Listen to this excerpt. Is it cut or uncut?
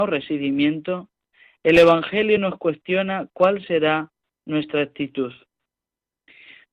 uncut